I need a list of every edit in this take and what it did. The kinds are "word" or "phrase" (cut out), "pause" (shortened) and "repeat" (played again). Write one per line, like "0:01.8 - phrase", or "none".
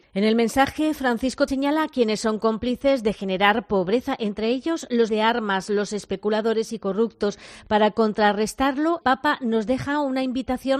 0:01.5 - word
0:05.1 - word
0:09.0 - word